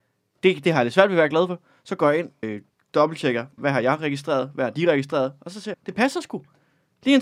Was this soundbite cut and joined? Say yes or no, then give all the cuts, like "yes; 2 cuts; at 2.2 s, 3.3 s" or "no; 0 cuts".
yes; 3 cuts; at 2.4 s, 3.6 s, 5.7 s